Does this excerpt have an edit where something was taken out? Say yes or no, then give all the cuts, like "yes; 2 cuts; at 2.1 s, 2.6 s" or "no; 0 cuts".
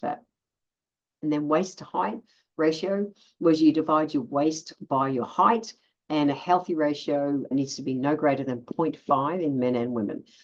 yes; 1 cut; at 7.5 s